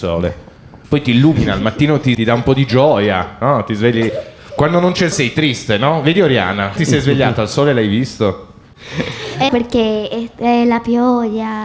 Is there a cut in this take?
yes; 4 cuts; at 2.1 s, 5.1 s, 6.8 s, 9.5 s

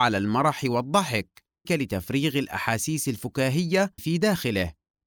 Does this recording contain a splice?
yes; 2 cuts; at 1.6 s, 4.0 s

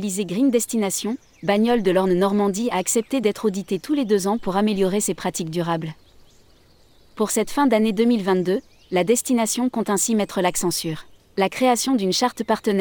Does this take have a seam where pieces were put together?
no; 0 cuts

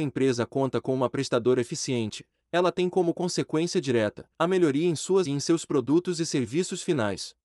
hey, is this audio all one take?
no; 2 cuts; at 4.3 s, 5.3 s

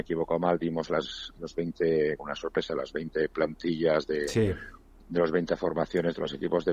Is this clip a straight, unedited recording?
no; 1 cut; at 2.2 s

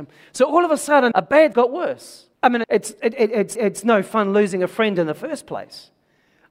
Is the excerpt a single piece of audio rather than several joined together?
no; 5 cuts; at 1.1 s, 1.5 s, 2.3 s, 2.6 s, 3.5 s

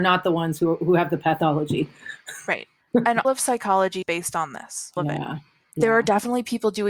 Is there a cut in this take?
yes; 3 cuts; at 3.2 s, 4.0 s, 5.0 s

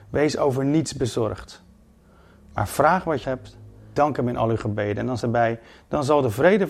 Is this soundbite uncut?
no; 3 cuts; at 3.2 s, 4.0 s, 5.2 s

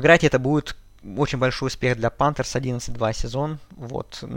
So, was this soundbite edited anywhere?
no; 0 cuts

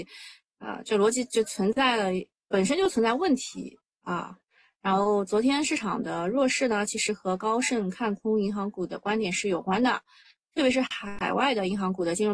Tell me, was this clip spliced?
no; 0 cuts

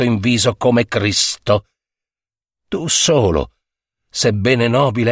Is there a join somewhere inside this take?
no; 0 cuts

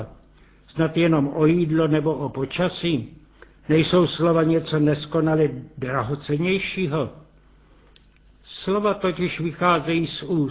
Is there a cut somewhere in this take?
no; 0 cuts

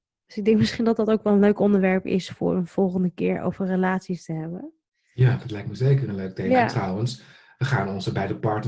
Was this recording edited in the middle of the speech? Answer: no; 0 cuts

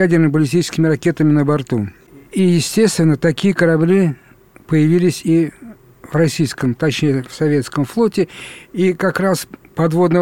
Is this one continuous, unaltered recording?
yes; 0 cuts

